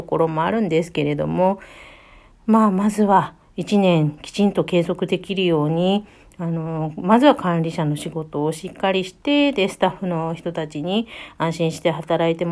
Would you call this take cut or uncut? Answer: uncut